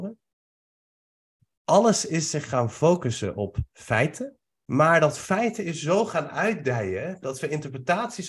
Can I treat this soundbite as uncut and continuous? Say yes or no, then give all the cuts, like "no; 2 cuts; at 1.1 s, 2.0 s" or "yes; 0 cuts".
no; 1 cut; at 4.6 s